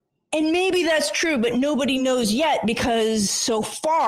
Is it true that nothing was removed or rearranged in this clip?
yes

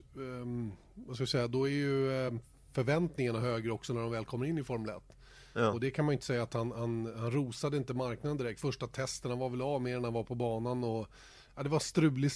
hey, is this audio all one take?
yes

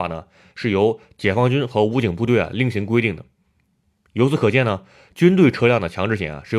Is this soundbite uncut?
yes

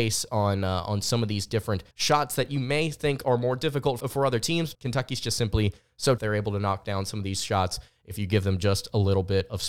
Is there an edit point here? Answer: yes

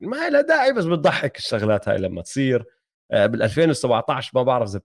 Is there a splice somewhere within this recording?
no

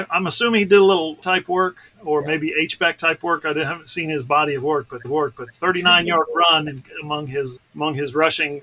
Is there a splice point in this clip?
yes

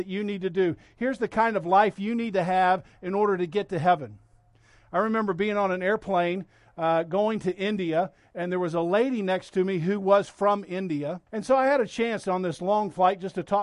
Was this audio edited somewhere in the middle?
yes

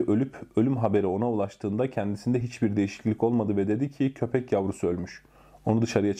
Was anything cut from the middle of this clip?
no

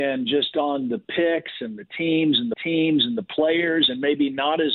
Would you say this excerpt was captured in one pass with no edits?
no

